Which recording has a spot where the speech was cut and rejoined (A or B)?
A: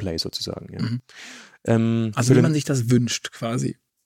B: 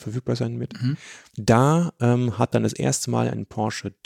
B